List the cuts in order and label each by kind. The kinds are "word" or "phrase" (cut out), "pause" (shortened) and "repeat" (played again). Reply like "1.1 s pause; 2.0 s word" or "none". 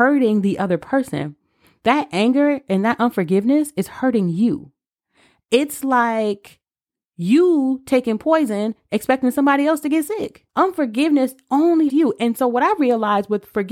10.5 s pause; 11.9 s word